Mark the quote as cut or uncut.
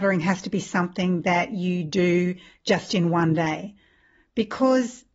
uncut